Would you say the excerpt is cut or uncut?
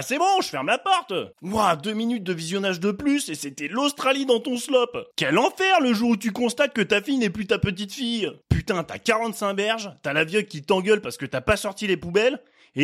cut